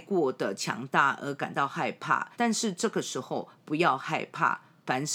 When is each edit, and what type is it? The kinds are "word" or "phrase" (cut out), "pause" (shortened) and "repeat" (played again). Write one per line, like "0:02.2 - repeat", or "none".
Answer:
0:02.3 - pause